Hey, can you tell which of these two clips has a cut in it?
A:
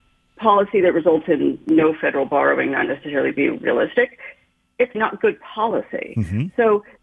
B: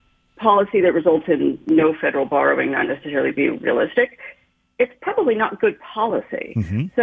A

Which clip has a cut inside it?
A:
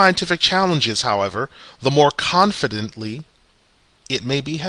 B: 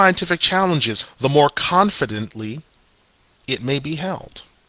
B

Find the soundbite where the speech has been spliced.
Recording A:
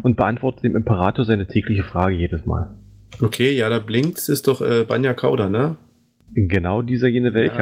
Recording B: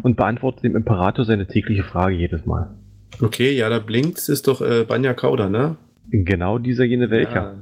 B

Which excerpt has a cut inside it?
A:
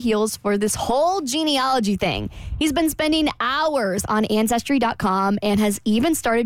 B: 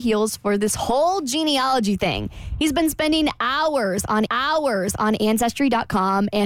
B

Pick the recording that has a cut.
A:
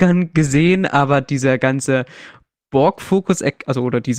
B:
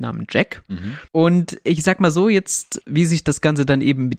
B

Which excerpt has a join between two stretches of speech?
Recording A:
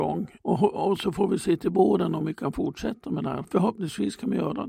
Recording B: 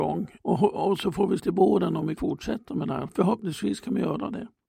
B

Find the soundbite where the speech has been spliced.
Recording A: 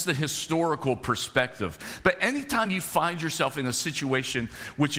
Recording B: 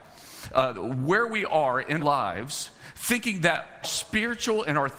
B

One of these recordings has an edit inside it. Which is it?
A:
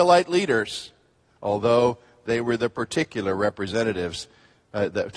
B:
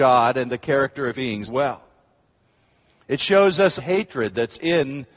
B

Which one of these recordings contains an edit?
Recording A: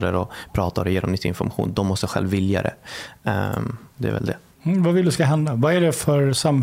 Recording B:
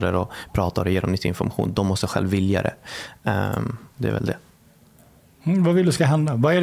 A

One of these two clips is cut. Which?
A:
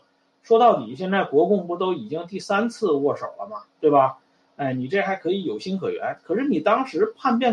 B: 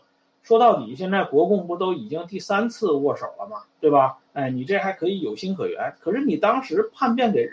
B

